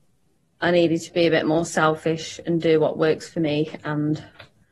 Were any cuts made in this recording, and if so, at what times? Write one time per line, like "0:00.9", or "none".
none

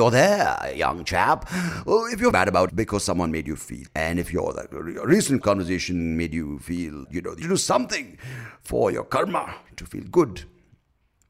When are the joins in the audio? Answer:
0:02.3
0:02.7
0:03.9
0:05.4
0:07.1
0:07.4

